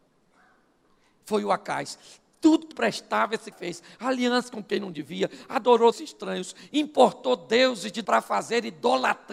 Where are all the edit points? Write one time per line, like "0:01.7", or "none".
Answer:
0:02.7
0:03.5
0:05.9
0:08.0